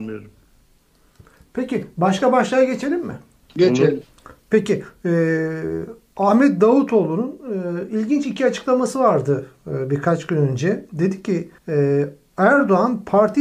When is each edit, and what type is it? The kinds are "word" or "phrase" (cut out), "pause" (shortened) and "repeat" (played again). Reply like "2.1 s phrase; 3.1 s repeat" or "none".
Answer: 3.4 s pause; 11.6 s pause